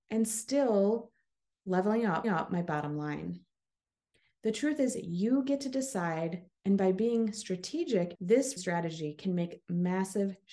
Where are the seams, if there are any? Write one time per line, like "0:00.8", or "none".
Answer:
0:02.2
0:06.6
0:08.1
0:08.6